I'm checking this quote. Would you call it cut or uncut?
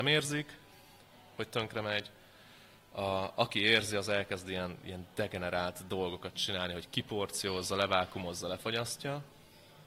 uncut